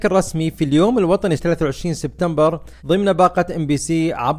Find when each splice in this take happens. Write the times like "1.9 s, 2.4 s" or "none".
1.4 s, 2.8 s